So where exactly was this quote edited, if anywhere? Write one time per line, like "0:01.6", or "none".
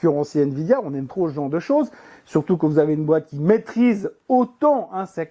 0:01.1